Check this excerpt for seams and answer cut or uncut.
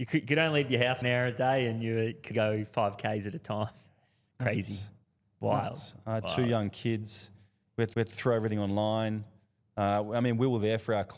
cut